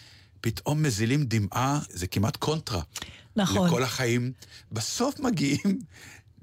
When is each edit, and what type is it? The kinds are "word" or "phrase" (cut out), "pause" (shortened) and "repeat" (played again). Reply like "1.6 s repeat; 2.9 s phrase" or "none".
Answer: 1.9 s word; 4.7 s phrase